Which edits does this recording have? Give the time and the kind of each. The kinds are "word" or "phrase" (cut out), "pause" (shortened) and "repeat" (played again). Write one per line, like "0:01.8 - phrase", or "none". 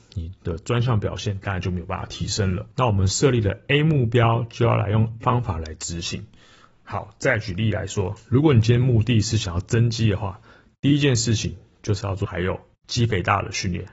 0:05.2 - word